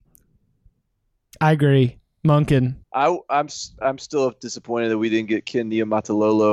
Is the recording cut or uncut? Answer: cut